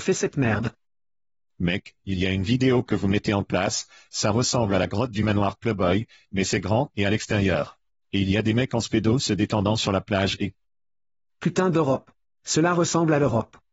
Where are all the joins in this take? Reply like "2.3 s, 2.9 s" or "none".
none